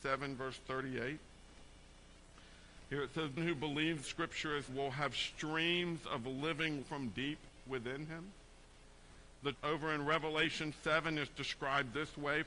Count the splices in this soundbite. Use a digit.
6